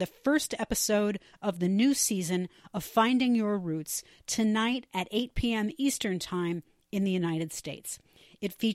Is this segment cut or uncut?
uncut